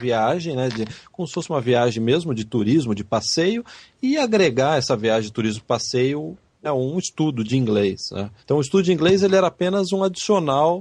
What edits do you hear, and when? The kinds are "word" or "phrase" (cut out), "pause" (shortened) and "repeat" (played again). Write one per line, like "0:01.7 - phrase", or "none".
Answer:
0:06.6 - word
0:08.4 - pause